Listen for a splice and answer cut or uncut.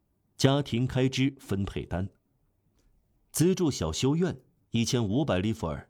uncut